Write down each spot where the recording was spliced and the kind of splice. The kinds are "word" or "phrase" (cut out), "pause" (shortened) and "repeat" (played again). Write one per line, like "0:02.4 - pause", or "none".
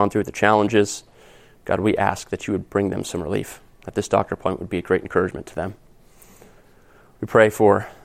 none

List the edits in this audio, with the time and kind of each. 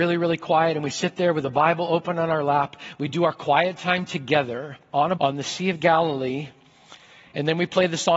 0:05.2 - word

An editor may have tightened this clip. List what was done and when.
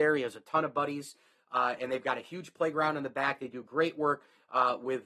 none

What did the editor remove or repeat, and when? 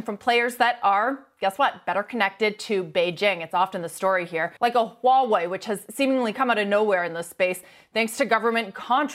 0:04.6 - pause

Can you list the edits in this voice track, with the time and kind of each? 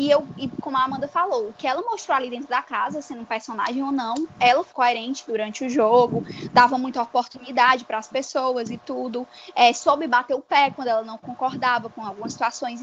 0:04.7 - word

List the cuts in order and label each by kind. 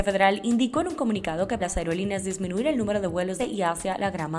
0:01.6 - phrase
0:03.4 - word

